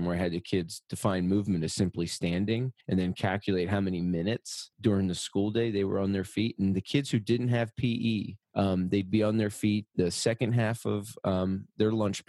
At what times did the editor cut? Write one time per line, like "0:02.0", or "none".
0:02.8
0:08.4